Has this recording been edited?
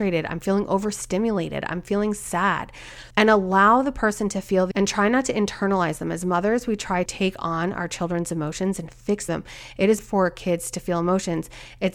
yes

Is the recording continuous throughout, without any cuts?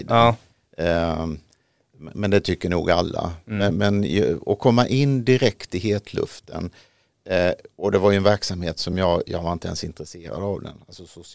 yes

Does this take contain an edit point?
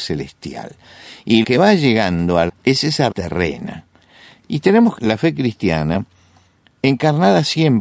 yes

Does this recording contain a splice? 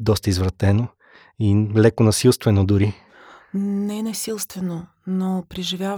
no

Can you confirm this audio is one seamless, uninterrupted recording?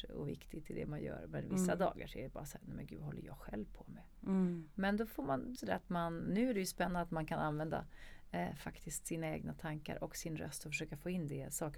no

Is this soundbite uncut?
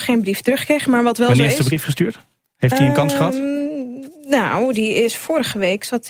yes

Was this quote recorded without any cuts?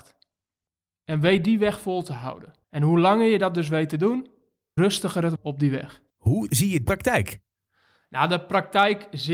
no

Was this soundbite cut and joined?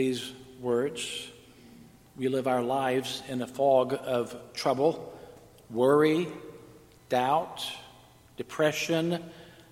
no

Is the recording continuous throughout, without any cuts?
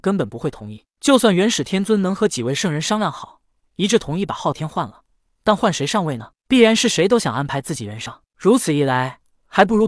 yes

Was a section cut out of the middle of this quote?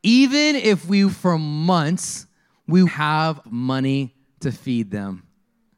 yes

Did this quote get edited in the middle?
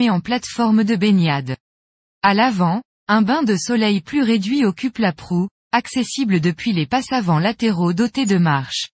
no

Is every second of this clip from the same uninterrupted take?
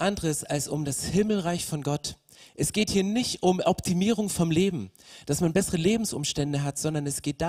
yes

